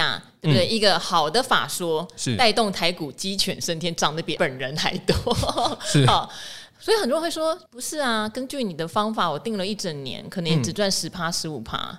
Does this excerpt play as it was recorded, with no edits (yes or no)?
no